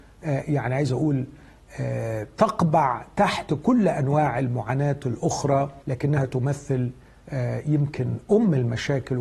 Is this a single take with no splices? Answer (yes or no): no